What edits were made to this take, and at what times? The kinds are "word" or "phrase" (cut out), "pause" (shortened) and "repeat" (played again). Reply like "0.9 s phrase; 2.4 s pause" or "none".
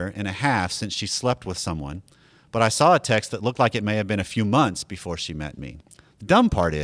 none